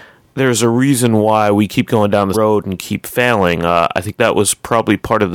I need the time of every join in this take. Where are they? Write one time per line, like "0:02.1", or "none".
0:02.3